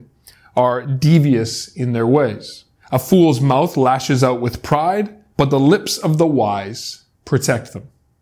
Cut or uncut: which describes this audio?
cut